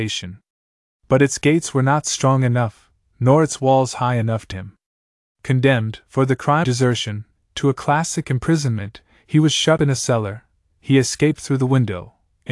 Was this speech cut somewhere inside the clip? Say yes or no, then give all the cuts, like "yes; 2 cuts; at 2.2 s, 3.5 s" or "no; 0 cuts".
yes; 3 cuts; at 4.5 s, 6.6 s, 9.8 s